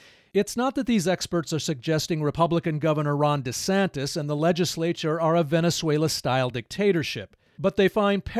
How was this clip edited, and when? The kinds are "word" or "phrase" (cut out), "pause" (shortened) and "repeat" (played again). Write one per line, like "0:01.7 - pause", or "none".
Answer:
none